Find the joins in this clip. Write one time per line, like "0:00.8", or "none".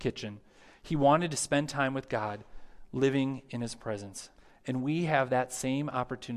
0:04.4